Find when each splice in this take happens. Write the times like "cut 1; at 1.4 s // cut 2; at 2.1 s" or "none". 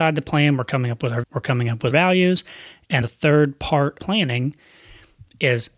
cut 1; at 1.2 s // cut 2; at 1.9 s // cut 3; at 3.0 s // cut 4; at 4.0 s